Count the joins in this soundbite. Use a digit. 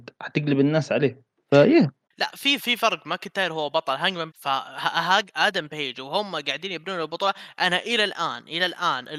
4